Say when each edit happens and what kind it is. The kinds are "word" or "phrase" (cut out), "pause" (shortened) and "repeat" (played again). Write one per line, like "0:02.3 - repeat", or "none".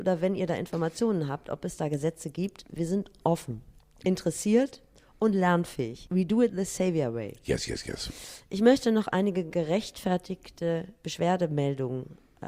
0:03.8 - pause